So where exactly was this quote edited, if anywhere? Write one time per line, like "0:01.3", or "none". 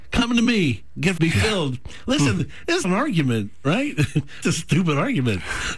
0:01.2
0:02.8
0:04.4